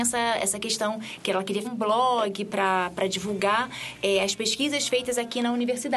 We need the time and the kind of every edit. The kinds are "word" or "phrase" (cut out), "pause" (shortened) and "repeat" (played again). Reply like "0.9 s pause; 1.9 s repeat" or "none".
1.6 s word